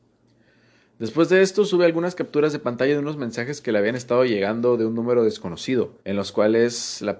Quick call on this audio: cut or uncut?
cut